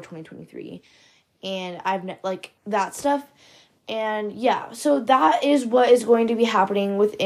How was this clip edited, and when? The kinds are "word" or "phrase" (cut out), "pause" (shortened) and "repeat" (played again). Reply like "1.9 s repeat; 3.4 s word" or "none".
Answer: 2.6 s pause